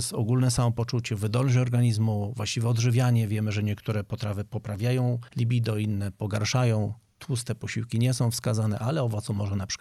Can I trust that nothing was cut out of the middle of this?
yes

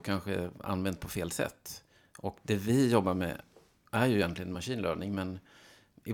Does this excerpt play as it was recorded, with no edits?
yes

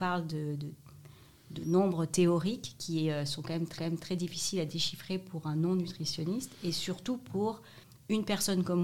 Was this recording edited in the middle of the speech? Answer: yes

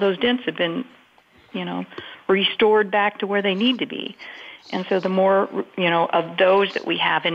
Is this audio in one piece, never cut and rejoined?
yes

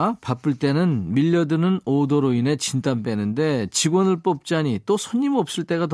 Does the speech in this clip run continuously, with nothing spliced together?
yes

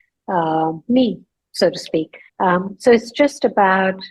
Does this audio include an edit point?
yes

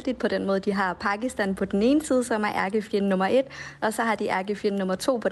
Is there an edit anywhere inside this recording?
no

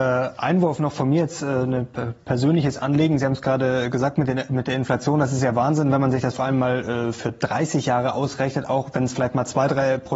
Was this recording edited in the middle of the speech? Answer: no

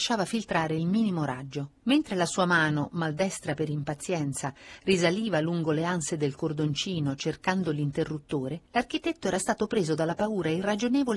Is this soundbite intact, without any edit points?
no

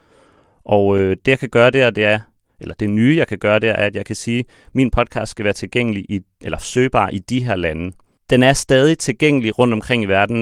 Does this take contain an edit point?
no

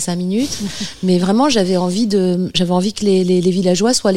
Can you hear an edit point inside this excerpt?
no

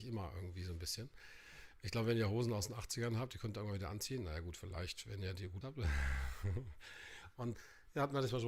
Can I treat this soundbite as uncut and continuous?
no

